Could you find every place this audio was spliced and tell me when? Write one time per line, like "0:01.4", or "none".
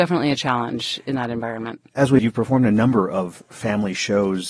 0:02.2